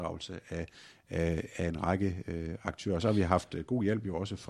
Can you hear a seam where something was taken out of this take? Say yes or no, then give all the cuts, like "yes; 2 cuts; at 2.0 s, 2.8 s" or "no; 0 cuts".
no; 0 cuts